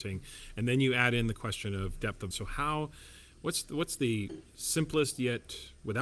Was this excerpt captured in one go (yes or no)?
no